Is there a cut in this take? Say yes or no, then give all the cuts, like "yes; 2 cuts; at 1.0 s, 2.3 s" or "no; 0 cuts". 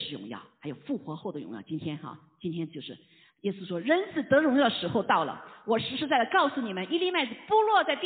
no; 0 cuts